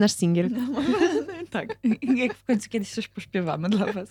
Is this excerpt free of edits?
yes; 0 cuts

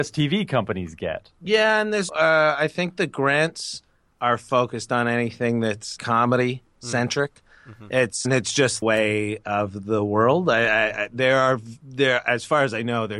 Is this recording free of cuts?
no; 5 cuts; at 2.1 s, 4.1 s, 6.0 s, 8.2 s, 8.8 s

